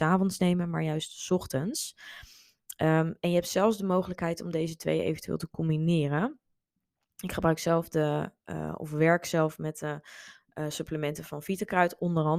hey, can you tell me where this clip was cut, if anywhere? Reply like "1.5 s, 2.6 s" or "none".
none

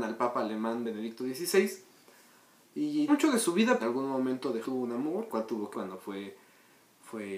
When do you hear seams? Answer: 3.1 s, 3.8 s, 4.6 s, 5.3 s, 5.7 s

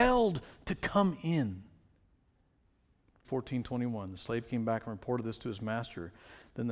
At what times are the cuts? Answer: 3.2 s

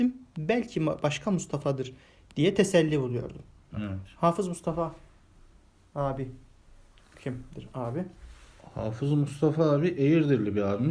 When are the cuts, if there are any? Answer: none

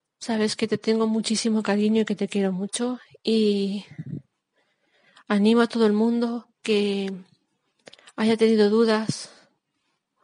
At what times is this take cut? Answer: 6.5 s

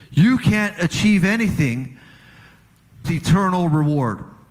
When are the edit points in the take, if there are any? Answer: 3.0 s

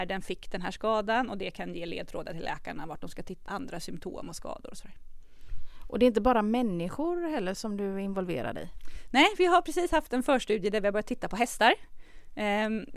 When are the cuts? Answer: 3.5 s

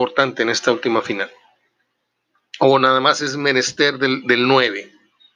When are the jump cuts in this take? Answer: none

